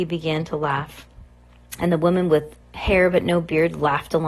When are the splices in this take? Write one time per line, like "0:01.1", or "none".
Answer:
0:02.6